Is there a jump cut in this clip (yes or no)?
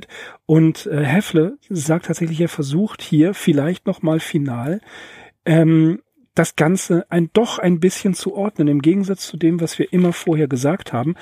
no